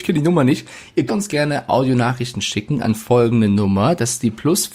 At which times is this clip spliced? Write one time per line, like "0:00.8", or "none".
0:01.1